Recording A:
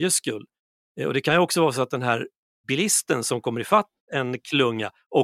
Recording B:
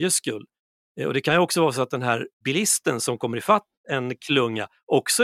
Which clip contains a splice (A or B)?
B